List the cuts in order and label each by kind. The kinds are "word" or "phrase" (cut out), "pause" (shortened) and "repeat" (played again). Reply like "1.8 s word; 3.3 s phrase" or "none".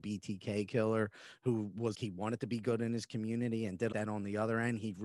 1.9 s word; 3.9 s phrase